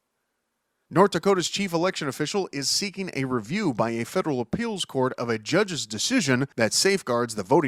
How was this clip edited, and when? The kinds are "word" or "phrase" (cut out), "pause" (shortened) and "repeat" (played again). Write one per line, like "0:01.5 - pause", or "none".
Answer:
0:06.5 - pause